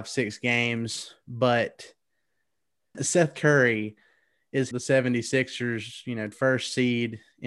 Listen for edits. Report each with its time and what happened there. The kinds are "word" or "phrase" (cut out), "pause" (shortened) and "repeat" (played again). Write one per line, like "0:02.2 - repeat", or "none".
0:02.9 - word
0:04.7 - word
0:06.3 - word

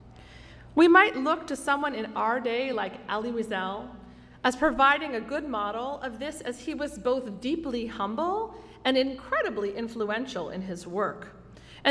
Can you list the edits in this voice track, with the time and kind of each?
none

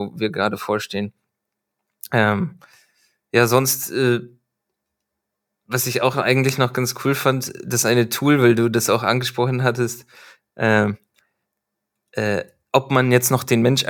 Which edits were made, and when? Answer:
none

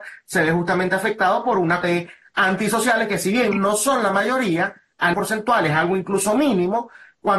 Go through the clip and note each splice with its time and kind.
0:01.8 - word
0:05.1 - word

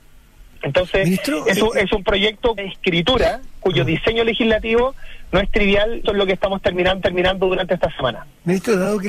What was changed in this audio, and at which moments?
0:02.6 - word
0:06.0 - word
0:07.0 - repeat

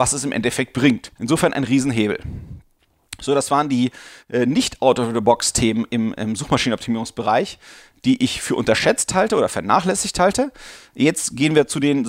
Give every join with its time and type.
0:01.2 - pause

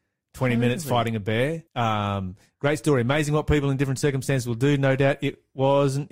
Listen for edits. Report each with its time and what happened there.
0:01.7 - pause

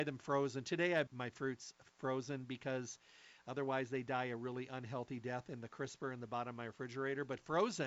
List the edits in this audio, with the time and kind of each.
0:01.1 - phrase

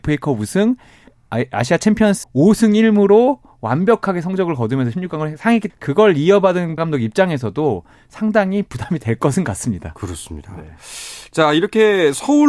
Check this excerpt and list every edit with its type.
0:01.1 - word
0:02.2 - word
0:05.7 - word
0:06.8 - word

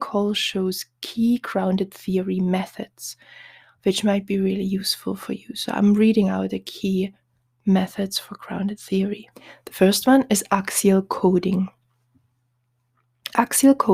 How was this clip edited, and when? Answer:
0:09.3 - pause

